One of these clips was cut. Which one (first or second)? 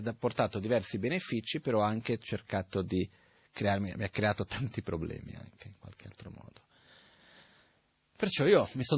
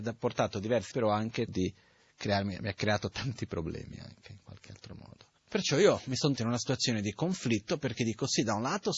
second